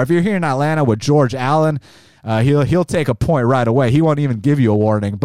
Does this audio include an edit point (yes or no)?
no